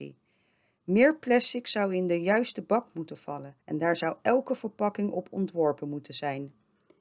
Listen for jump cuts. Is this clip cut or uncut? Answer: cut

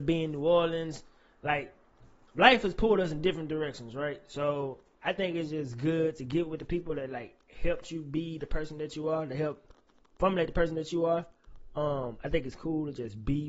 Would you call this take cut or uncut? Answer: cut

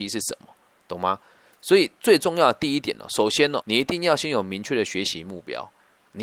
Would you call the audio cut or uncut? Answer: cut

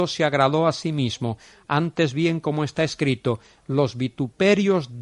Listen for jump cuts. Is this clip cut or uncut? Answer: uncut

